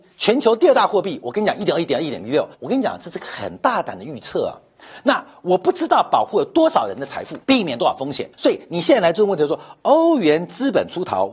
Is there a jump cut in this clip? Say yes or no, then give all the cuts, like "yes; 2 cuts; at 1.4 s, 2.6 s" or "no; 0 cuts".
yes; 3 cuts; at 2.5 s, 7.4 s, 8.3 s